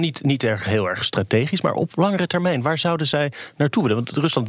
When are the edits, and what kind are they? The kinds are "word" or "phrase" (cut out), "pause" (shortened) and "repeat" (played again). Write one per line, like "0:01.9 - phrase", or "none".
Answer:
none